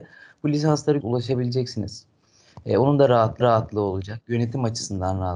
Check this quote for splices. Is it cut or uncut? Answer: cut